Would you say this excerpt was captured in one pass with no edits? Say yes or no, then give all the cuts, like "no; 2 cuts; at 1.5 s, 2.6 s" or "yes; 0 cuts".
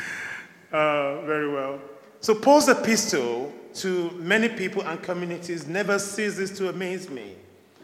yes; 0 cuts